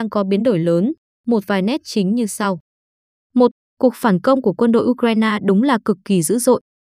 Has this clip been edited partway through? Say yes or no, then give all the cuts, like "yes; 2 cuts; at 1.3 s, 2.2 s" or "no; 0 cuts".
no; 0 cuts